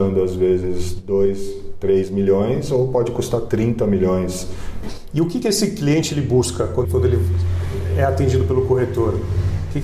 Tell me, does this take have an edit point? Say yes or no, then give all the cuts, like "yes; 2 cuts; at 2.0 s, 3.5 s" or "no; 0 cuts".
yes; 1 cut; at 6.8 s